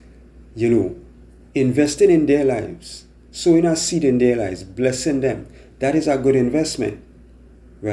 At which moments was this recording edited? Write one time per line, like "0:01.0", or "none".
none

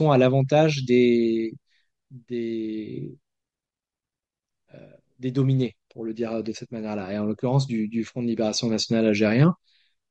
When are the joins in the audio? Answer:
none

